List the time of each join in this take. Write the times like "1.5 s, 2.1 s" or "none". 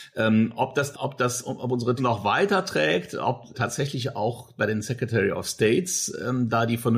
0.9 s, 2.0 s, 3.5 s